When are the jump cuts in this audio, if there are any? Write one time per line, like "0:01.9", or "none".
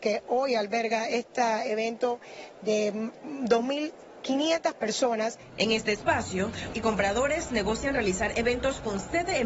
0:06.7